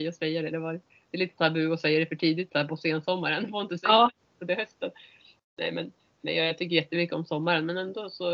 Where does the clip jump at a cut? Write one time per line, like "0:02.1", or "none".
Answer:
none